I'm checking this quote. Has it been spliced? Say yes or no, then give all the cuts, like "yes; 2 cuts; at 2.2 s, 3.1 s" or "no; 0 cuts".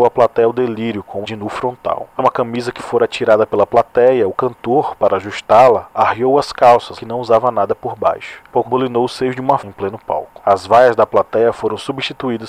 yes; 6 cuts; at 1.2 s, 2.2 s, 2.8 s, 7.0 s, 8.6 s, 9.6 s